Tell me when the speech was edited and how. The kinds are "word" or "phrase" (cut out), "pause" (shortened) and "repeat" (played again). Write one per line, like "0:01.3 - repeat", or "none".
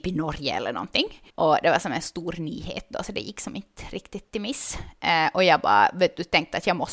0:01.3 - pause